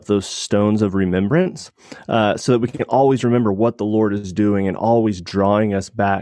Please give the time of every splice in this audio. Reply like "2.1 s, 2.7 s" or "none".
none